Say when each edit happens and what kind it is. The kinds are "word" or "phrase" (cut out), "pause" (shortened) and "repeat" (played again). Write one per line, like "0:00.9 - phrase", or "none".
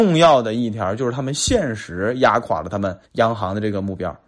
0:03.0 - pause